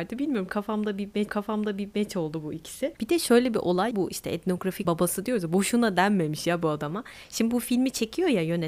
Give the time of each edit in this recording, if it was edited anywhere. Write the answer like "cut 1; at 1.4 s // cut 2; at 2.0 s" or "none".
cut 1; at 1.3 s // cut 2; at 3.0 s // cut 3; at 3.9 s // cut 4; at 4.8 s